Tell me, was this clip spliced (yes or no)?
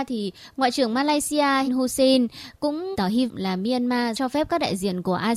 yes